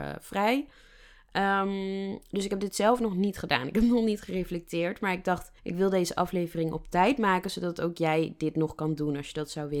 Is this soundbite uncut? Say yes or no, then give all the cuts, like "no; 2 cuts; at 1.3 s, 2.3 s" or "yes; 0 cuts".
no; 1 cut; at 5.6 s